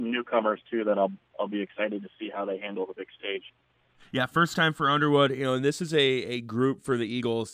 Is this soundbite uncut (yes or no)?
yes